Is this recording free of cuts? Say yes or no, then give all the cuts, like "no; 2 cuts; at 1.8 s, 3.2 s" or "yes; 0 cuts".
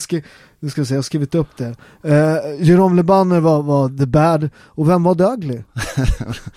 yes; 0 cuts